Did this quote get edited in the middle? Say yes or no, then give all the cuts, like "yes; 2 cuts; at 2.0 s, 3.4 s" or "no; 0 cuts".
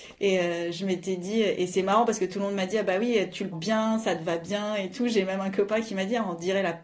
yes; 1 cut; at 3.5 s